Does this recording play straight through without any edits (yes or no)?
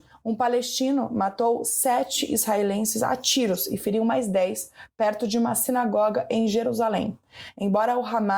yes